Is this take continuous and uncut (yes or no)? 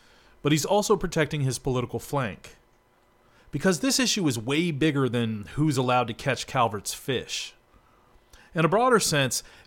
yes